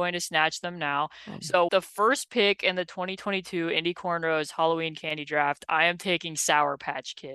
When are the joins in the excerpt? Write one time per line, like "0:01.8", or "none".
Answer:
0:01.7